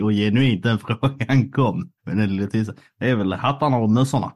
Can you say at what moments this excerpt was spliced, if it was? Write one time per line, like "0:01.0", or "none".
0:02.0